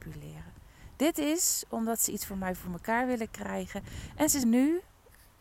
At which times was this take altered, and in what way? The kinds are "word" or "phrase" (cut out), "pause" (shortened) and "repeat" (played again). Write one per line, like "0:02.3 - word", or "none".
0:04.4 - word